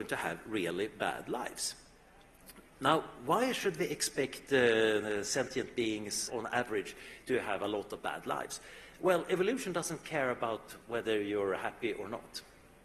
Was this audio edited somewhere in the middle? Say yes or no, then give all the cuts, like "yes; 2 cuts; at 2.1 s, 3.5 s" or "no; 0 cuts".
yes; 1 cut; at 6.3 s